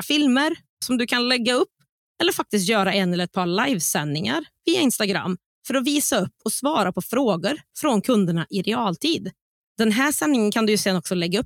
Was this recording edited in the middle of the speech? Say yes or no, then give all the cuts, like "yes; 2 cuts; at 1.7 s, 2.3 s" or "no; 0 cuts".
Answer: no; 0 cuts